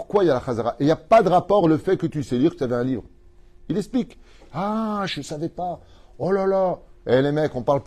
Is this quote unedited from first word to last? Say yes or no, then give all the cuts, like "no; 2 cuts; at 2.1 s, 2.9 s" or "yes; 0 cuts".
yes; 0 cuts